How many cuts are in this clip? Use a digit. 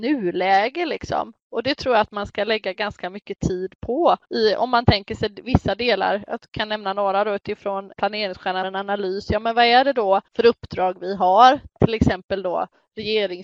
4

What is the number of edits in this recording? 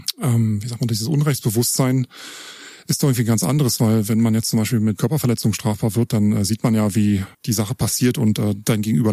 2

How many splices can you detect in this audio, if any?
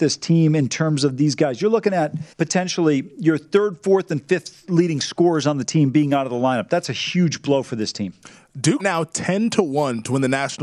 2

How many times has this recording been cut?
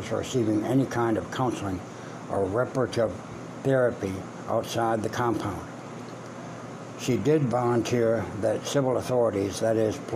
0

